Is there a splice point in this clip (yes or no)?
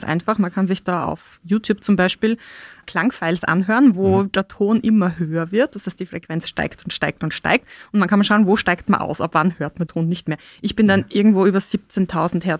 yes